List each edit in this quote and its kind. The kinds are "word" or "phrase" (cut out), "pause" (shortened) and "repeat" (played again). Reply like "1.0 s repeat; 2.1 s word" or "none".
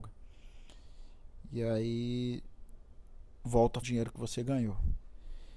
3.4 s word; 3.8 s phrase